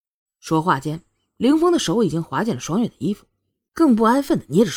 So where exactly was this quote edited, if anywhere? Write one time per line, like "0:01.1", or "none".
none